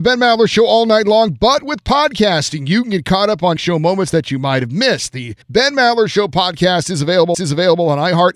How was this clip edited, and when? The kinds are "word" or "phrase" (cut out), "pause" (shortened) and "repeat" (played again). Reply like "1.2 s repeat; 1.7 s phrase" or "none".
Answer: 3.6 s word; 5.4 s pause; 7.3 s repeat